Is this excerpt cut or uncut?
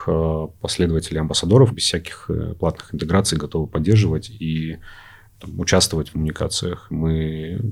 cut